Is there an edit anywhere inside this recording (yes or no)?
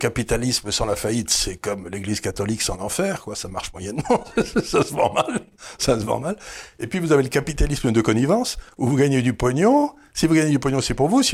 no